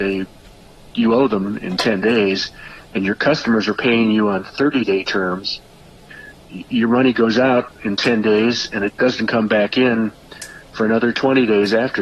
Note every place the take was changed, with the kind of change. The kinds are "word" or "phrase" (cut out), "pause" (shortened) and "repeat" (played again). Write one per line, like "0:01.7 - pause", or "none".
0:06.4 - word
0:08.9 - pause

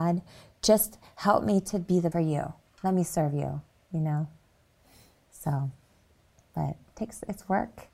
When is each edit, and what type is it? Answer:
0:02.1 - phrase

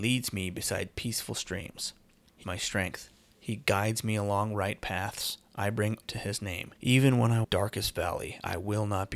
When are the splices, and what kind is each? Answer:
0:02.4 - word
0:06.0 - word
0:06.7 - pause
0:07.4 - phrase

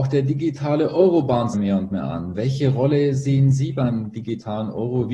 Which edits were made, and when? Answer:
0:01.5 - phrase

